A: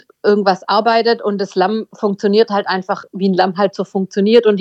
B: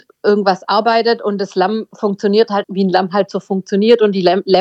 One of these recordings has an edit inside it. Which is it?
B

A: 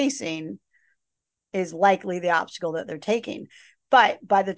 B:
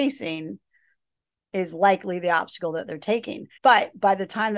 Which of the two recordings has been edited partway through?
B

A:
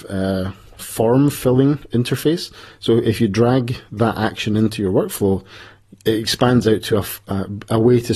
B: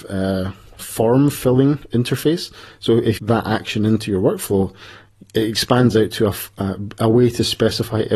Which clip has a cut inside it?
B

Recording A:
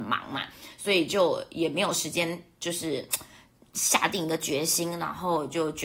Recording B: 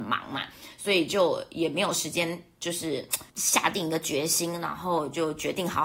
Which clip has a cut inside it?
B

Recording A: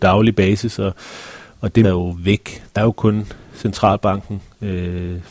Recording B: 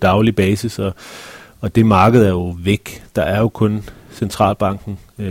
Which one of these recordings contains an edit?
A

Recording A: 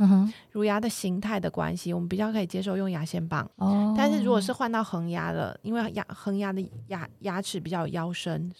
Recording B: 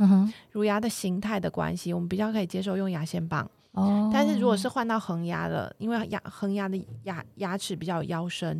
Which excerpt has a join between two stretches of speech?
A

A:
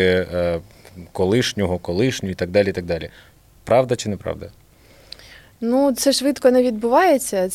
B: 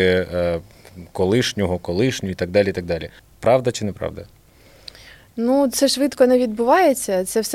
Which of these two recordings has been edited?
B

